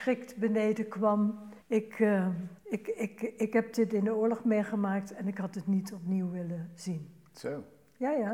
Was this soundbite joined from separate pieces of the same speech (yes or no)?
yes